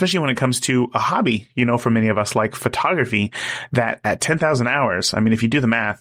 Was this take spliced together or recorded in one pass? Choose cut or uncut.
uncut